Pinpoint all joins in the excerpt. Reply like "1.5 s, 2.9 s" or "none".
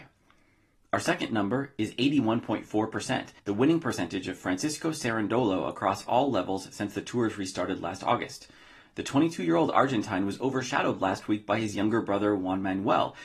3.4 s